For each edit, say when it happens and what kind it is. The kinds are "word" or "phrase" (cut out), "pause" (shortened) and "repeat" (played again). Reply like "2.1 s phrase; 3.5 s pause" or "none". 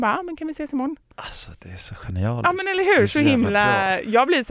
1.1 s pause